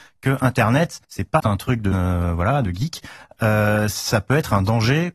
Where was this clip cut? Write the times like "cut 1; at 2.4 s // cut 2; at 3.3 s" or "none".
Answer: cut 1; at 1.0 s // cut 2; at 1.4 s // cut 3; at 1.9 s